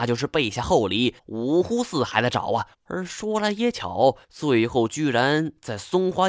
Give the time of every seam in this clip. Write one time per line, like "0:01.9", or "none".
0:01.2
0:02.7
0:04.2